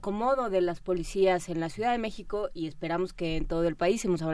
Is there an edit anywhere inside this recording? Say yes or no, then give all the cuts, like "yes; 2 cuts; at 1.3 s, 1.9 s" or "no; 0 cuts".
no; 0 cuts